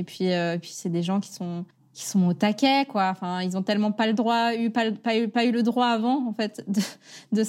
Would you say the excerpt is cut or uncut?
cut